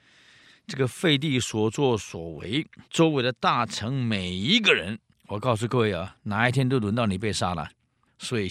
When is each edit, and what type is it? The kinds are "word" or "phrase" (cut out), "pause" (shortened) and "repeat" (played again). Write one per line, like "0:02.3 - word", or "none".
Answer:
0:02.9 - pause
0:05.1 - pause